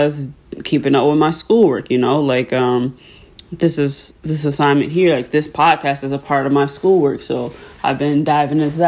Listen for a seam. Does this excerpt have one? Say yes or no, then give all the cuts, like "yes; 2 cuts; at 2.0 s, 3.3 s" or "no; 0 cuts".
no; 0 cuts